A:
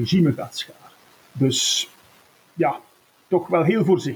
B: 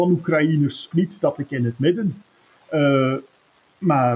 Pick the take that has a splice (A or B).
B